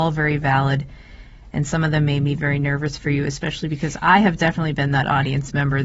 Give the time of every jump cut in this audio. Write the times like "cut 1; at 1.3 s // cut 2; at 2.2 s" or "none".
none

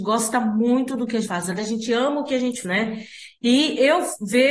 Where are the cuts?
cut 1; at 1.2 s // cut 2; at 1.6 s // cut 3; at 2.6 s

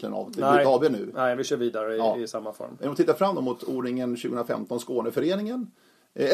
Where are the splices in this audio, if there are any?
none

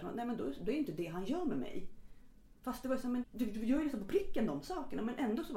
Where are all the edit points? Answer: cut 1; at 3.2 s

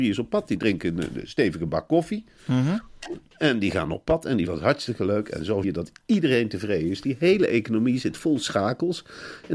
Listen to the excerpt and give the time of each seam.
cut 1; at 4.5 s // cut 2; at 5.6 s

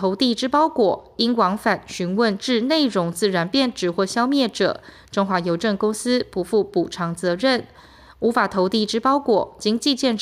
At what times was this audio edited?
none

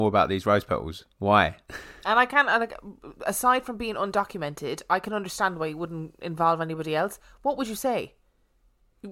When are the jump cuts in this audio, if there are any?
cut 1; at 1.1 s

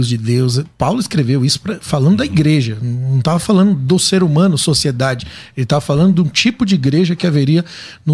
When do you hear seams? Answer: none

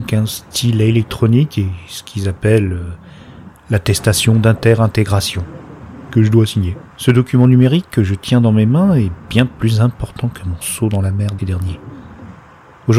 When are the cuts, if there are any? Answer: cut 1; at 6.9 s // cut 2; at 11.4 s

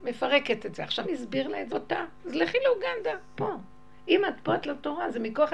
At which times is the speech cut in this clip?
cut 1; at 1.0 s // cut 2; at 1.7 s // cut 3; at 3.3 s // cut 4; at 4.6 s

